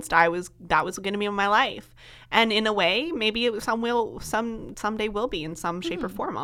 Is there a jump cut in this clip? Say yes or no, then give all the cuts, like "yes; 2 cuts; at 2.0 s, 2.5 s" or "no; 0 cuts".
no; 0 cuts